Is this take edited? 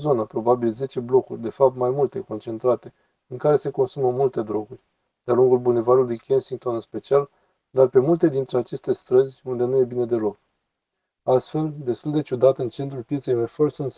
no; 0 cuts

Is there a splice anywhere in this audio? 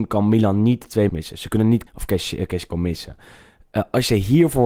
yes; 3 cuts; at 1.1 s, 1.9 s, 2.7 s

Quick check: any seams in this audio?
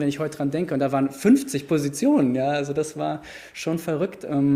no; 0 cuts

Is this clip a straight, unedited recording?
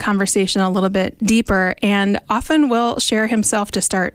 yes; 0 cuts

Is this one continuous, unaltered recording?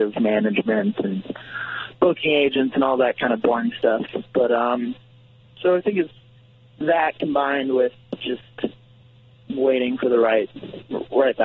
yes; 0 cuts

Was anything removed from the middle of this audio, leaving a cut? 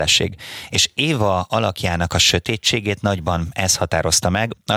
no; 0 cuts

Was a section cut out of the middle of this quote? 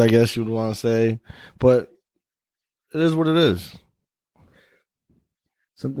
no; 0 cuts

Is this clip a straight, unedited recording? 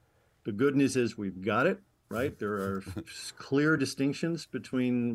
yes; 0 cuts

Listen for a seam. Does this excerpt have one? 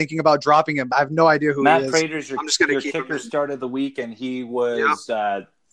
yes; 1 cut; at 0.9 s

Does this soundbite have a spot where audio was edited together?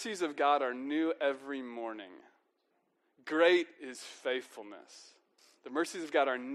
yes; 2 cuts; at 3.9 s, 5.4 s

